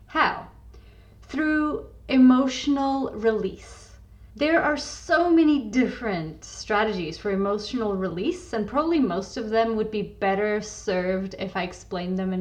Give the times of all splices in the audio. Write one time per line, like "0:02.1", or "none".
0:04.3